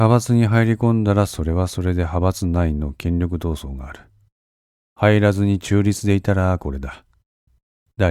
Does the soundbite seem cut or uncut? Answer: uncut